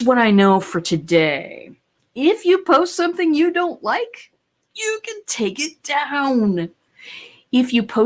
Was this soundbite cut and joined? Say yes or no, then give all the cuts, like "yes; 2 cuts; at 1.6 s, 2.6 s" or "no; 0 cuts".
no; 0 cuts